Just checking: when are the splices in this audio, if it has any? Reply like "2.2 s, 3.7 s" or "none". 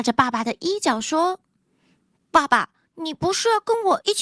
none